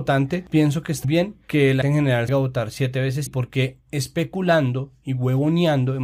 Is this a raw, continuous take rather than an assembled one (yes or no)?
no